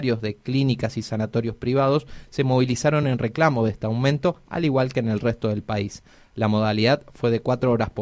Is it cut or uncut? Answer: uncut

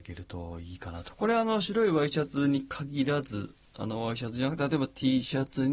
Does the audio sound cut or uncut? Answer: uncut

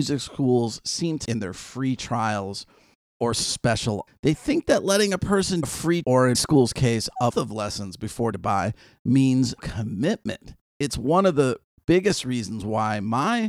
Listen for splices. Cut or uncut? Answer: cut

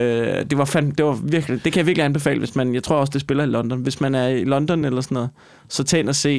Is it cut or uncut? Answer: uncut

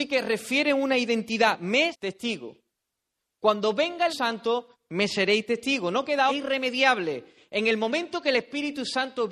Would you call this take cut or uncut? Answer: cut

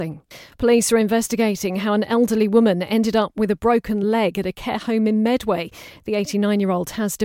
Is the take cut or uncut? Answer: uncut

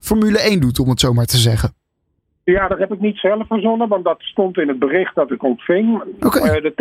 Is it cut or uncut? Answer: uncut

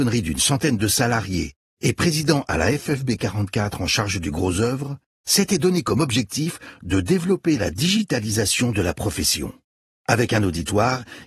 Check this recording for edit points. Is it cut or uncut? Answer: uncut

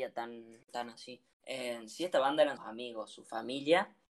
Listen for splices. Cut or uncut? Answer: cut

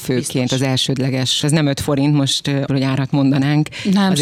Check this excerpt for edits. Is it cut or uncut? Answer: cut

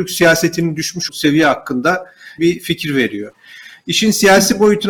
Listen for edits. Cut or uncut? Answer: cut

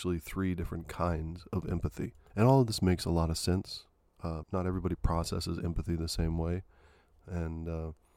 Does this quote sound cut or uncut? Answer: cut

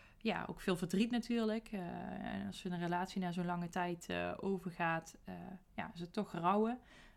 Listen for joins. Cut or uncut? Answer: uncut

